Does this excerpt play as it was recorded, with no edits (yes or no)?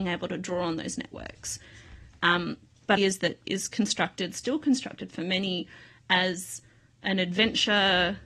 no